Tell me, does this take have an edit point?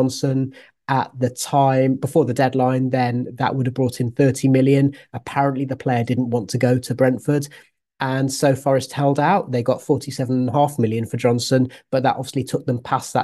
no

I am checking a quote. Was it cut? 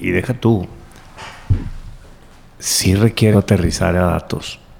yes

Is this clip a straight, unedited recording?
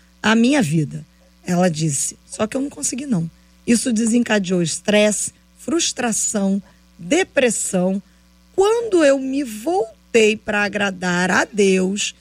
yes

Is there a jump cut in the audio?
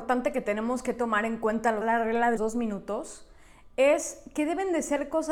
yes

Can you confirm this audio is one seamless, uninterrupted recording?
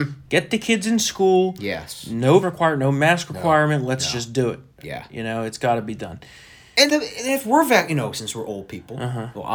no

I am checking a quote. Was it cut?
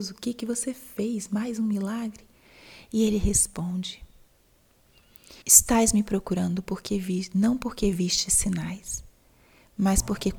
yes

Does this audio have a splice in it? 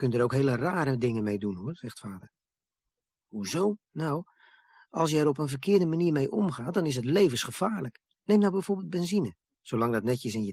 yes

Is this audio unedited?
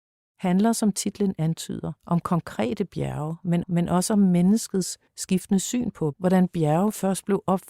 no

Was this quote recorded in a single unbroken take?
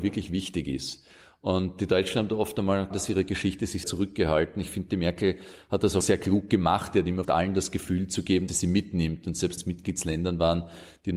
no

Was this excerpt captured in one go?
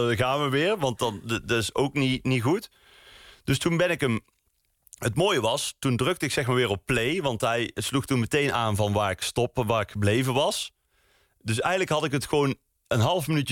yes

